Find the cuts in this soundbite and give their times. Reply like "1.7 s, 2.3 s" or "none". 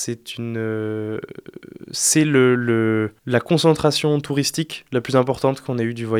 3.2 s